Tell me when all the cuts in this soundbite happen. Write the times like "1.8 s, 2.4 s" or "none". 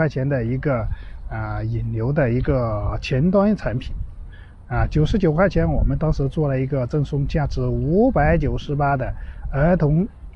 none